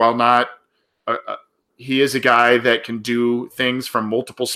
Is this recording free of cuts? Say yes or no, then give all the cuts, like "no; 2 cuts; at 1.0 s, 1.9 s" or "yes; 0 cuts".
no; 1 cut; at 1.7 s